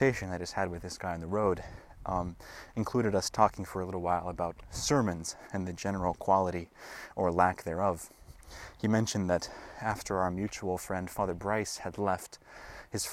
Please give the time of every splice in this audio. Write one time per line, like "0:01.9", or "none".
none